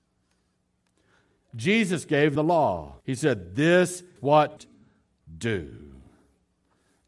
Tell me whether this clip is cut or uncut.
cut